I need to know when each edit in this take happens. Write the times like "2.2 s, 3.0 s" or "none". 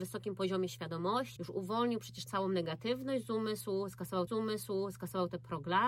1.4 s, 2.3 s, 4.3 s